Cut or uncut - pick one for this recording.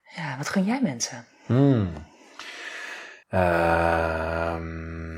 cut